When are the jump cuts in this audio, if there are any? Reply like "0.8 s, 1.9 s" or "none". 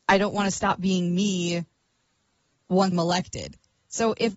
2.9 s